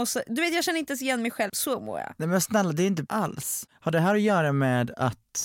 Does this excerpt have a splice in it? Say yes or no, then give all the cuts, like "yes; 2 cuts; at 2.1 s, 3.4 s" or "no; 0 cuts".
yes; 2 cuts; at 1.5 s, 3.1 s